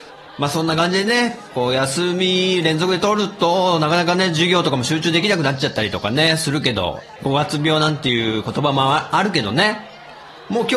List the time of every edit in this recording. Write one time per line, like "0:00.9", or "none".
0:07.2